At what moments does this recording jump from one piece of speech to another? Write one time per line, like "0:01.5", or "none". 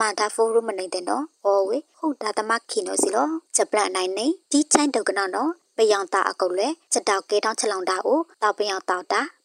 0:05.6